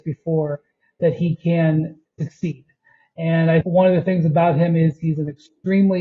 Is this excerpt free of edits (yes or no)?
no